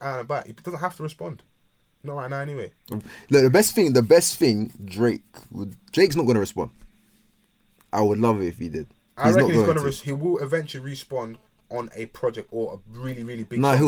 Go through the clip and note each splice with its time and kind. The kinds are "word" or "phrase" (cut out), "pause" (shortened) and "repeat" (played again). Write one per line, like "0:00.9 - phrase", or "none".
none